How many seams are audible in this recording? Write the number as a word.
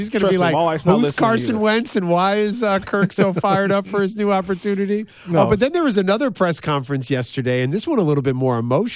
zero